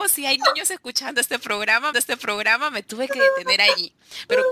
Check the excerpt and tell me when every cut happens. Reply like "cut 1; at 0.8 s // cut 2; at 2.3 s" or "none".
cut 1; at 1.9 s